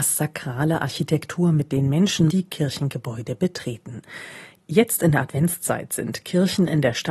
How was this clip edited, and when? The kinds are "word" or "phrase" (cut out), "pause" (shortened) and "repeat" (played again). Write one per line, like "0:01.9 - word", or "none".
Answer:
0:02.3 - word

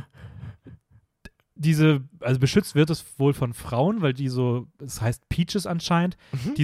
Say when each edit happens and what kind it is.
none

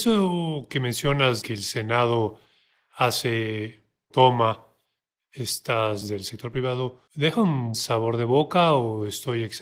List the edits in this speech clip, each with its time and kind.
0:01.4 - word
0:04.1 - word
0:06.0 - word
0:07.1 - pause
0:07.7 - word

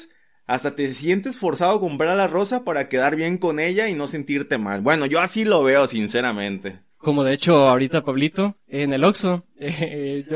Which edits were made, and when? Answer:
none

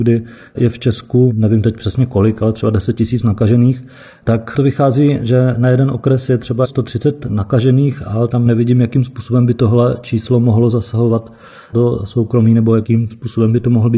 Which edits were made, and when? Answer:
none

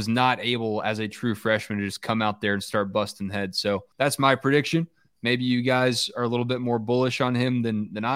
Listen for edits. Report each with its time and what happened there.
0:03.9 - pause

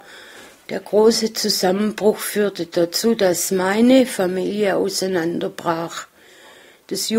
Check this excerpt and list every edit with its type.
none

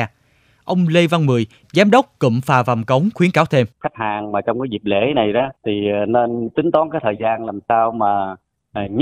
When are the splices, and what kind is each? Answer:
0:03.7 - pause
0:05.6 - pause

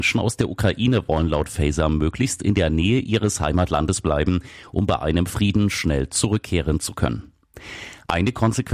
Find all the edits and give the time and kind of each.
none

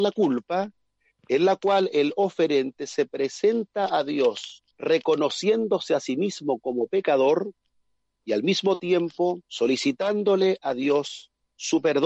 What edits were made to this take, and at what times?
0:04.7 - pause
0:09.4 - pause

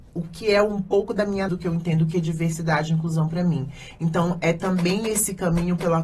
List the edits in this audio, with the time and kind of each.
0:01.5 - word

